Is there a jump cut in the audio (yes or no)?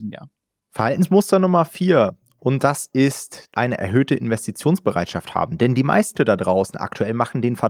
yes